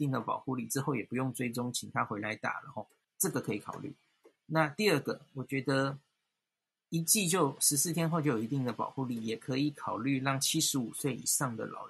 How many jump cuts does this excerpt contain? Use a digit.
1